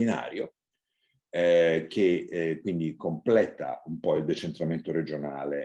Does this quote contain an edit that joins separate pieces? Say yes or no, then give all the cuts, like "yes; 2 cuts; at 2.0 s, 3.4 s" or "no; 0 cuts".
no; 0 cuts